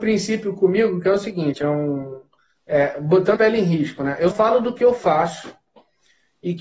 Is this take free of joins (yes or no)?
no